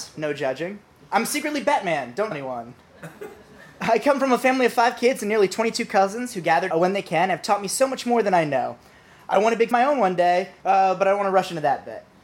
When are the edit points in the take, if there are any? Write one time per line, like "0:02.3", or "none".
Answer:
0:01.0
0:02.3
0:06.7
0:09.7